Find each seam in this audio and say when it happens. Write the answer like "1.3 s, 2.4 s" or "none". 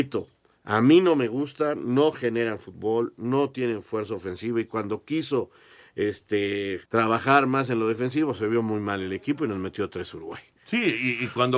6.9 s